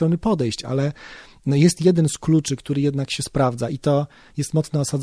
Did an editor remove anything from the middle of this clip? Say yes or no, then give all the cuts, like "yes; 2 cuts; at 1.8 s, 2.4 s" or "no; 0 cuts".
no; 0 cuts